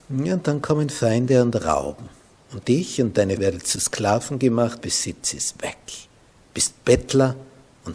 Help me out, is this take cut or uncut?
cut